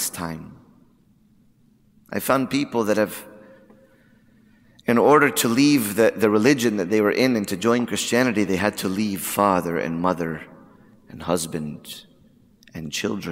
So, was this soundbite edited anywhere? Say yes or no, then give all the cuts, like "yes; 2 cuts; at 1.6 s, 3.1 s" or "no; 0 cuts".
no; 0 cuts